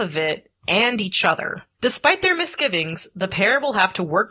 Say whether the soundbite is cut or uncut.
uncut